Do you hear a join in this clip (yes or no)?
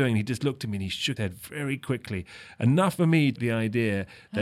yes